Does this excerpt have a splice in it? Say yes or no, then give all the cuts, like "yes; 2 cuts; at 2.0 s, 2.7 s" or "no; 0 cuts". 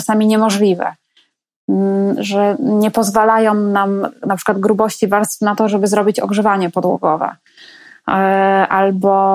no; 0 cuts